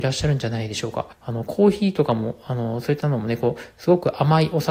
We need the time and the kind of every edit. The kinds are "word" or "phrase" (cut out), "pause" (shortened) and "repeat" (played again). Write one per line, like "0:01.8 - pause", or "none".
0:01.1 - pause